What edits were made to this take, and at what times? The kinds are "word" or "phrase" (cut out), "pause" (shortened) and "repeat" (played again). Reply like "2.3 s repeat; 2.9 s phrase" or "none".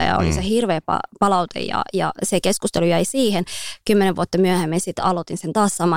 none